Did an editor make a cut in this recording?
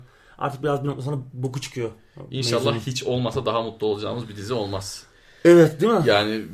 no; 0 cuts

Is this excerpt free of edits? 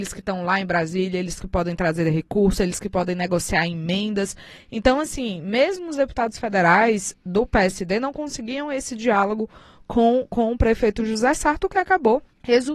yes; 0 cuts

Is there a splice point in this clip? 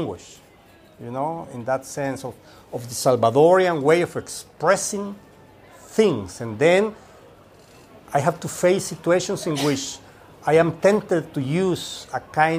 no; 0 cuts

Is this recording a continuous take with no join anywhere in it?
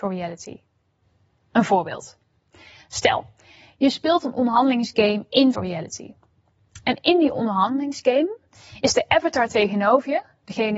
no; 1 cut; at 5.5 s

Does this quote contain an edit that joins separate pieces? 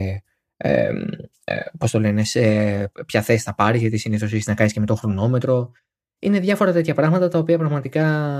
no; 0 cuts

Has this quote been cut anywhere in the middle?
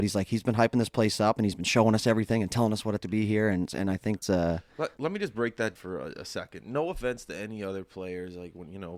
yes; 4 cuts; at 3.0 s, 4.2 s, 5.0 s, 5.7 s

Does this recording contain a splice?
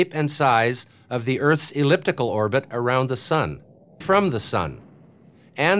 yes; 1 cut; at 4.0 s

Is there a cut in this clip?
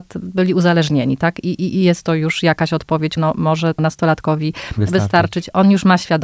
yes; 2 cuts; at 3.2 s, 3.8 s

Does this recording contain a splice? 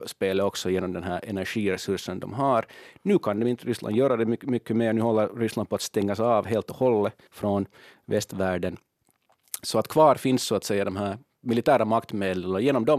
yes; 1 cut; at 7.3 s

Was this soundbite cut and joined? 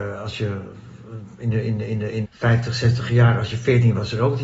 yes; 1 cut; at 2.2 s

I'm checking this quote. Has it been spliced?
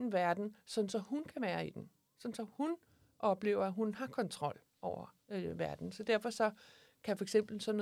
yes; 1 cut; at 5.2 s

